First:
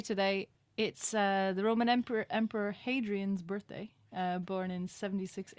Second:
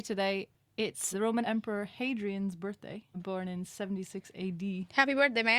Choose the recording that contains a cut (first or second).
second